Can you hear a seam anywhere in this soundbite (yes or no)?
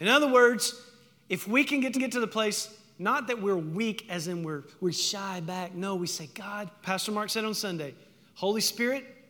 yes